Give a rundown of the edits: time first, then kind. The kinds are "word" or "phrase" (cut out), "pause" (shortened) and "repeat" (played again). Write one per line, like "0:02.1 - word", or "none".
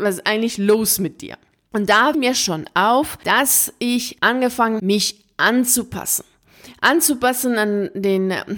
0:02.1 - word
0:04.8 - word